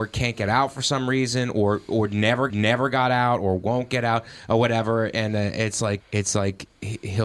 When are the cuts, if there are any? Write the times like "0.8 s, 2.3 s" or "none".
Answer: 2.5 s, 6.0 s